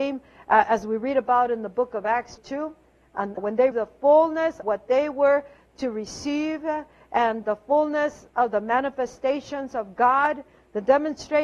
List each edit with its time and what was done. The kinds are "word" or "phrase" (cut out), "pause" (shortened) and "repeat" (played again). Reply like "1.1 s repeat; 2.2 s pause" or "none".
2.4 s word; 3.4 s word; 3.7 s word; 4.6 s word; 7.4 s word

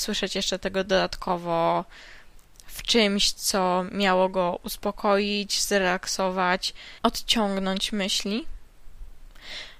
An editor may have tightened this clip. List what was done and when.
7.0 s pause

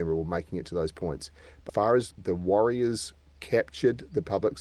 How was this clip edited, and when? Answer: 1.7 s word; 2.1 s word

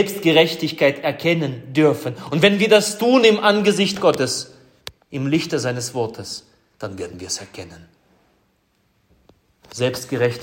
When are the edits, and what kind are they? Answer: none

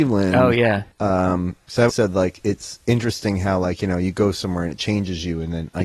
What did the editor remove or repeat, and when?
0.9 s pause; 1.9 s word

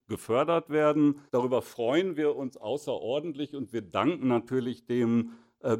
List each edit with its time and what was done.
1.3 s pause

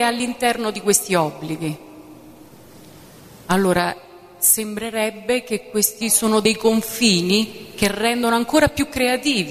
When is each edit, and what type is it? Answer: 6.0 s word

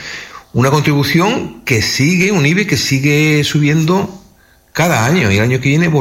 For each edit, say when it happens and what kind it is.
none

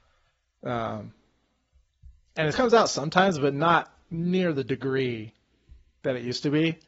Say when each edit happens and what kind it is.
2.5 s word

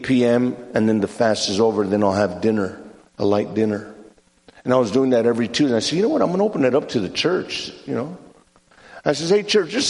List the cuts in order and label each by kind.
none

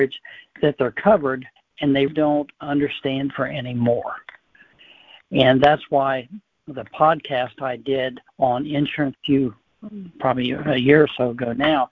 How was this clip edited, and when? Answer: 1.6 s pause; 2.1 s word; 3.3 s phrase; 8.3 s pause; 9.1 s phrase

